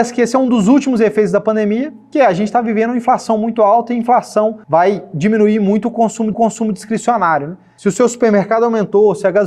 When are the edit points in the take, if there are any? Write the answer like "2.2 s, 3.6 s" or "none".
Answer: 4.6 s, 6.3 s